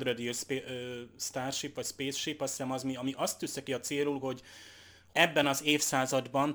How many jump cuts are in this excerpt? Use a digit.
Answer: 0